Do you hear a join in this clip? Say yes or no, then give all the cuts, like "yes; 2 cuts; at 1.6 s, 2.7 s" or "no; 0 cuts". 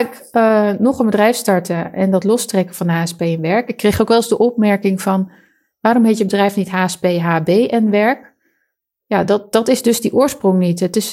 no; 0 cuts